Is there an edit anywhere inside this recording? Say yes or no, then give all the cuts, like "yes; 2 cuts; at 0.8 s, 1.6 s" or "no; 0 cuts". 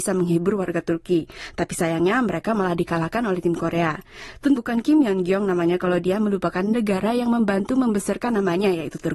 yes; 1 cut; at 4.6 s